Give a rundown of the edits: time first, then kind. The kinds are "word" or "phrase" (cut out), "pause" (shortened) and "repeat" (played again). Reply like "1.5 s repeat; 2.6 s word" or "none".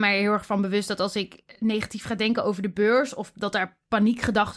none